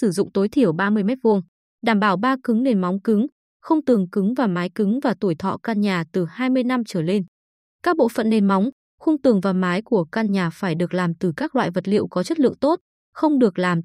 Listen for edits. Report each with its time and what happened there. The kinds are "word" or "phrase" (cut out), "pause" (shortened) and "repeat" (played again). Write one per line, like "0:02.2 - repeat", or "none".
none